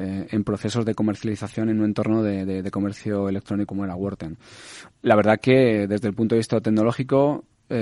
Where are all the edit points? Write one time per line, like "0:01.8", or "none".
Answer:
0:03.7